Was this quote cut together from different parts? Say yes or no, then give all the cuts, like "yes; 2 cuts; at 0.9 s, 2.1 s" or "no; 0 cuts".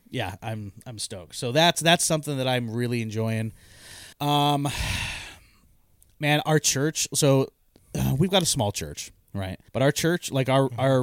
yes; 2 cuts; at 4.1 s, 9.7 s